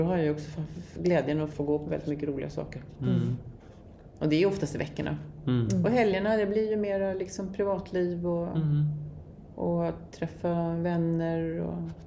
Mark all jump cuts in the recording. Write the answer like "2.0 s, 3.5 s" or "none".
1.5 s